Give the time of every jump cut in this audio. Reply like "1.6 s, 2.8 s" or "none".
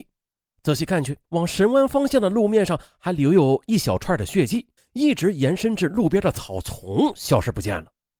1.2 s, 4.8 s